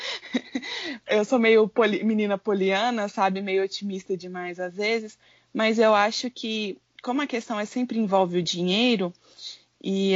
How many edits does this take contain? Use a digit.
0